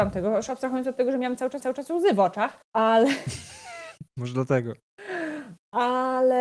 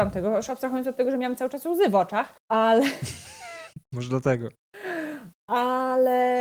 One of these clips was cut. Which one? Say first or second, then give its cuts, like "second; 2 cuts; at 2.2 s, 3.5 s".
first; 1 cut; at 1.6 s